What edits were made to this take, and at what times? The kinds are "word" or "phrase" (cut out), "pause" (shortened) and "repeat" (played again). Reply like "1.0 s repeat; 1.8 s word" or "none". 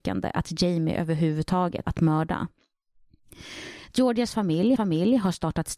1.8 s phrase; 4.8 s repeat